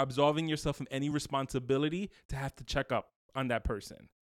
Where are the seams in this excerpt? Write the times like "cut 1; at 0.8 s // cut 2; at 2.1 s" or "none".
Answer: none